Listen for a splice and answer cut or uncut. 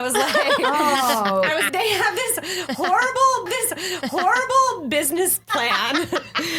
cut